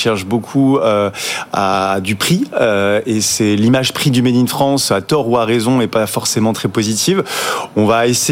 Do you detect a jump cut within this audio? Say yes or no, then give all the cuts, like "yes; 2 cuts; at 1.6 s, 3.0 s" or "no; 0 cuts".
no; 0 cuts